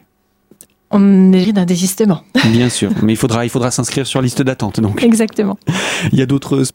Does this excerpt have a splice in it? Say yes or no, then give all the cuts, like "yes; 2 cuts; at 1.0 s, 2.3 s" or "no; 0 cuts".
yes; 1 cut; at 1.4 s